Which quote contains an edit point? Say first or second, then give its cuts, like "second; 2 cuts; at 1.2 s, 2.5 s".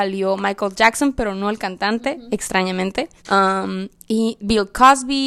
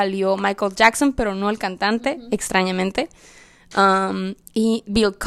first; 1 cut; at 3.2 s